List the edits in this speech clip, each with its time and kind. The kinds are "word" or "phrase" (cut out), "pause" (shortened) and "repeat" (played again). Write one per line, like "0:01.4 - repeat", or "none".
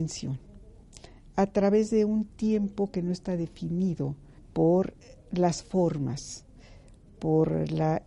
0:04.4 - pause